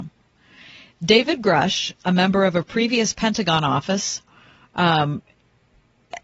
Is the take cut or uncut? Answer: uncut